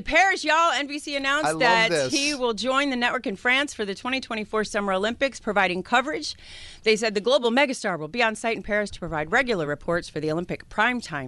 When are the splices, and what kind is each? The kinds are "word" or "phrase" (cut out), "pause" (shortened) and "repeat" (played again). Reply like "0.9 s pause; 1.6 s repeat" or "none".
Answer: none